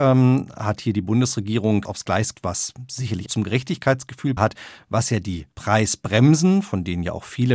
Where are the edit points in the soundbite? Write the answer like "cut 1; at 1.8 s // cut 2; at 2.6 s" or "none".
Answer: cut 1; at 1.8 s // cut 2; at 2.3 s // cut 3; at 3.3 s // cut 4; at 4.4 s // cut 5; at 5.5 s